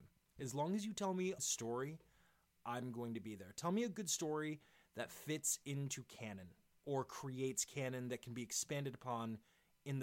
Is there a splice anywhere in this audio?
yes; 1 cut; at 1.4 s

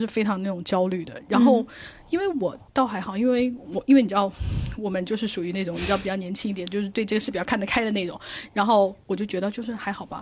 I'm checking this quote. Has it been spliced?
no; 0 cuts

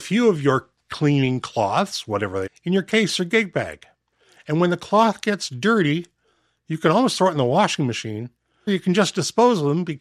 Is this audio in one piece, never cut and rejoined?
no; 2 cuts; at 2.5 s, 8.7 s

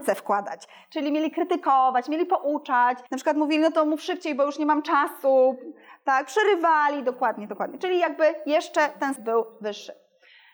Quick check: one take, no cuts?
no; 2 cuts; at 3.1 s, 9.2 s

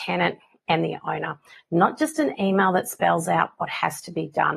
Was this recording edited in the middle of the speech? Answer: no; 0 cuts

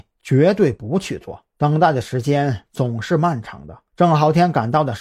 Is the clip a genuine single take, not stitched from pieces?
no; 2 cuts; at 1.5 s, 3.9 s

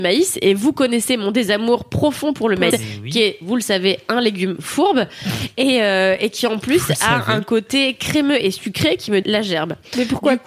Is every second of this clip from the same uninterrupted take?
no; 2 cuts; at 2.7 s, 9.2 s

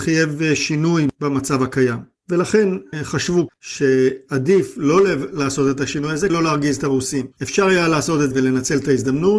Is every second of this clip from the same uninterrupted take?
no; 4 cuts; at 3.5 s, 6.3 s, 7.3 s, 8.3 s

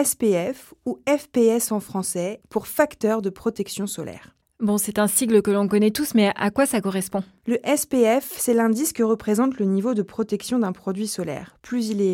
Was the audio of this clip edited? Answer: no; 0 cuts

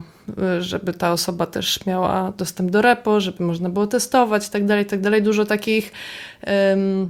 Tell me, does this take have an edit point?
no; 0 cuts

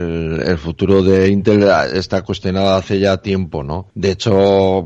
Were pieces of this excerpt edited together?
yes; 1 cut; at 3.9 s

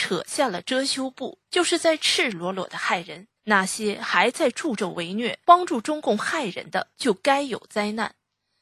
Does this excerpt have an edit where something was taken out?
yes; 4 cuts; at 1.5 s, 3.4 s, 5.4 s, 6.9 s

